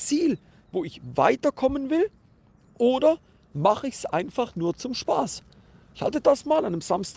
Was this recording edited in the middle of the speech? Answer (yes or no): no